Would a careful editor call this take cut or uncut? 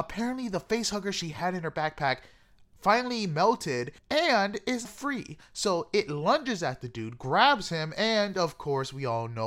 cut